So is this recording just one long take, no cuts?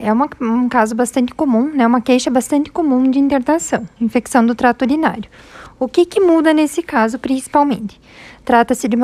yes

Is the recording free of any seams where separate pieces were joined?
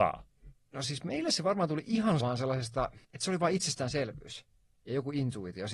no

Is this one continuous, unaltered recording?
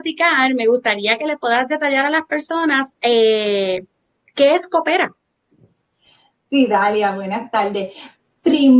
yes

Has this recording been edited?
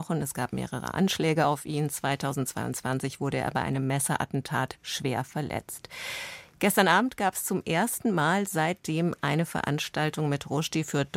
no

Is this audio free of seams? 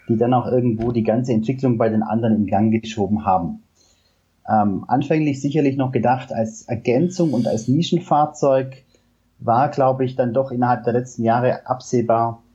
yes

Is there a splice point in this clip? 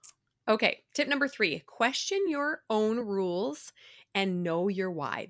no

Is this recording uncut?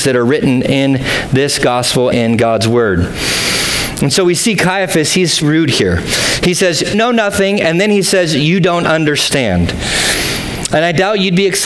no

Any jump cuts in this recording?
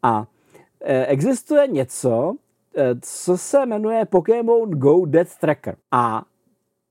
yes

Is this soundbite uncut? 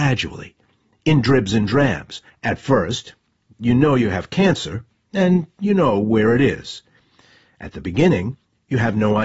no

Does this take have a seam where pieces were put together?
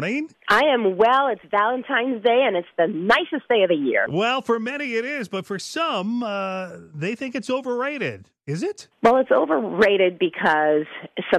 no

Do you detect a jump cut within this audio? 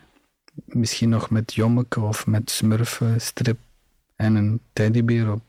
no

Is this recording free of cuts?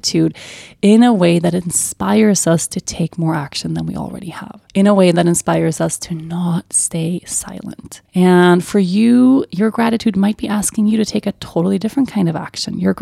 no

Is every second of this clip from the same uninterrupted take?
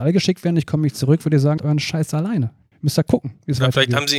no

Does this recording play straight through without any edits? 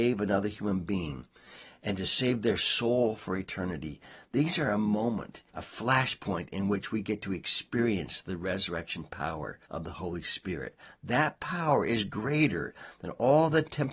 no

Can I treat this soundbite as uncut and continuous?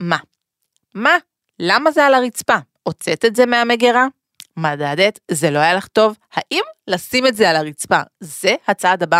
yes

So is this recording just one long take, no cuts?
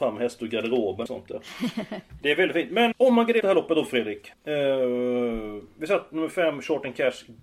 no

